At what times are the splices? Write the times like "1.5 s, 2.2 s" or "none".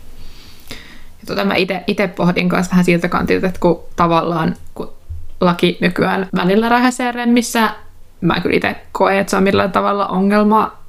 6.3 s